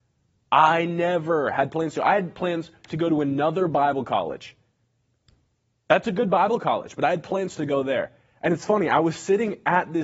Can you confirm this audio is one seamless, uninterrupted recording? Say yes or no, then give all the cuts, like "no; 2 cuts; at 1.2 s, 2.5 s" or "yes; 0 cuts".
yes; 0 cuts